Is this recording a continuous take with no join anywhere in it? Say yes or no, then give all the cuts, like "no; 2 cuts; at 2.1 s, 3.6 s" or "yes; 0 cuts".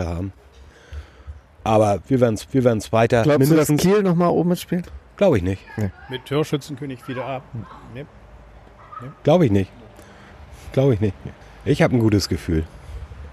no; 2 cuts; at 2.5 s, 11.4 s